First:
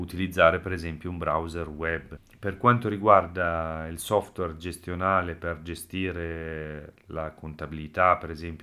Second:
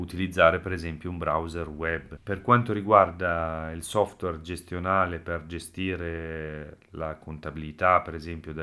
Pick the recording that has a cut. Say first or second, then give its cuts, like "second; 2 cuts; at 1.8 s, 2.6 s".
second; 1 cut; at 2.2 s